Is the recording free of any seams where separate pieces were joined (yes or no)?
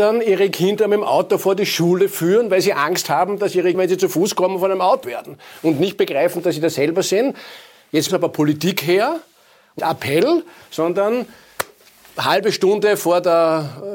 no